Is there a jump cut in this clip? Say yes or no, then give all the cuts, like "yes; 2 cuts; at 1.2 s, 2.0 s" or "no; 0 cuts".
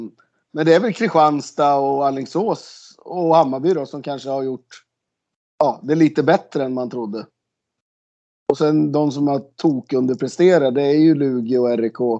no; 0 cuts